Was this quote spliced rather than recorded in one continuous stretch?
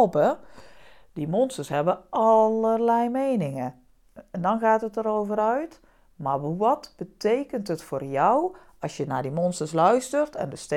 no; 0 cuts

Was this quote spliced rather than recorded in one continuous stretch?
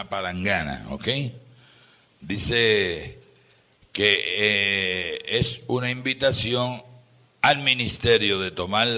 no; 0 cuts

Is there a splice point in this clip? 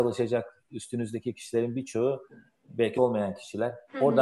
yes; 1 cut; at 3.0 s

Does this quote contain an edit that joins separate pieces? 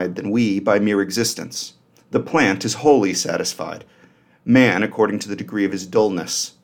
no; 0 cuts

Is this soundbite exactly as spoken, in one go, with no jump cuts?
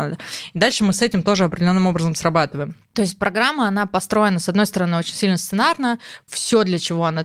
yes; 0 cuts

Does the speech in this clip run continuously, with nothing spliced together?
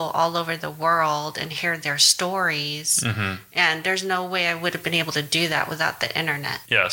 yes; 0 cuts

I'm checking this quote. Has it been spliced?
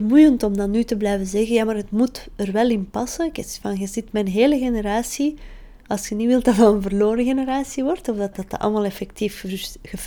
yes; 1 cut; at 8.3 s

